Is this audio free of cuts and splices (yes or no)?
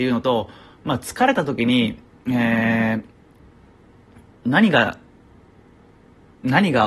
yes